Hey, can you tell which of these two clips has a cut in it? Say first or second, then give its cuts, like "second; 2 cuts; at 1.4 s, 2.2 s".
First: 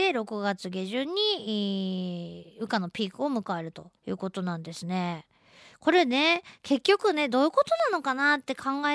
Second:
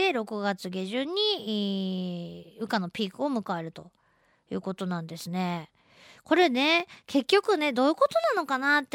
first; 1 cut; at 4.0 s